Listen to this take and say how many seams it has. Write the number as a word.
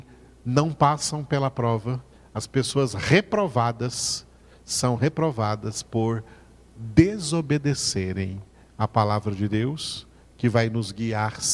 zero